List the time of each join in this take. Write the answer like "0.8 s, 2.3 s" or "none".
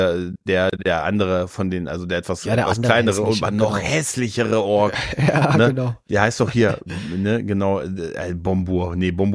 none